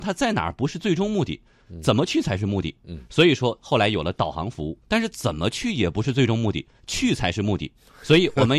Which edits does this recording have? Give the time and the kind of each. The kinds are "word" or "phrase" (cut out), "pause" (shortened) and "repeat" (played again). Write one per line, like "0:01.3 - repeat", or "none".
0:04.8 - pause